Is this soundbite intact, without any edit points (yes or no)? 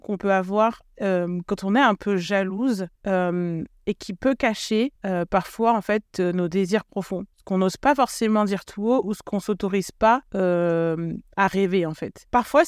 no